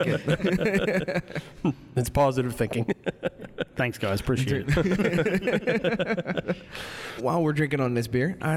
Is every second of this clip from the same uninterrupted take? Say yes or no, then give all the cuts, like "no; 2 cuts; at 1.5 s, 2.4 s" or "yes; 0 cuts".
no; 1 cut; at 7.2 s